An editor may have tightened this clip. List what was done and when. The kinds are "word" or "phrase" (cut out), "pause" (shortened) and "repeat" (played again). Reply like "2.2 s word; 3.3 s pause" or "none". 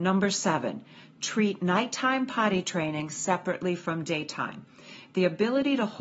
none

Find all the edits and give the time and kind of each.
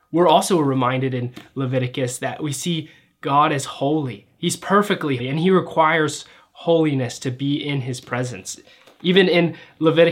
5.2 s word

